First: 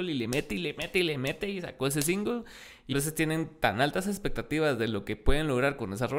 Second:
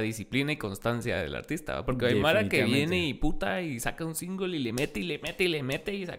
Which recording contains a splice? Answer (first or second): first